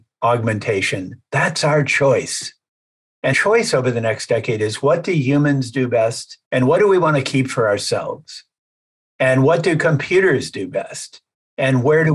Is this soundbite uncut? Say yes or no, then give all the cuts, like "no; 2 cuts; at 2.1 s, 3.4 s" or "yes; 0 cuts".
no; 2 cuts; at 3.3 s, 6.4 s